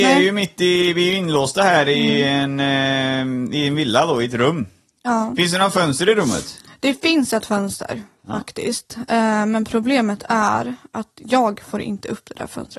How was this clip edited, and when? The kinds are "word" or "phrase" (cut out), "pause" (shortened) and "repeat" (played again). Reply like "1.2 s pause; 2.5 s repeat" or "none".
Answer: none